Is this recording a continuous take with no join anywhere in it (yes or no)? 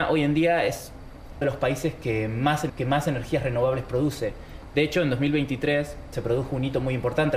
no